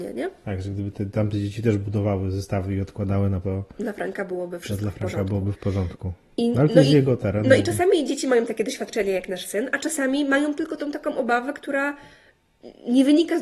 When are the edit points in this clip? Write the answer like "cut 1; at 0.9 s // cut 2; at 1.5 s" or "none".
cut 1; at 3.4 s